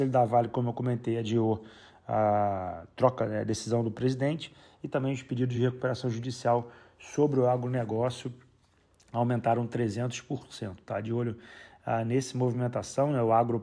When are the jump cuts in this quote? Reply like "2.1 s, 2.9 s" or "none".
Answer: none